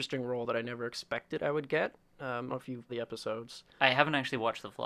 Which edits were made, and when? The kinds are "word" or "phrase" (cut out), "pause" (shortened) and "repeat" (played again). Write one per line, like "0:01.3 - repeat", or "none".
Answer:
0:02.5 - phrase
0:02.9 - word
0:03.7 - pause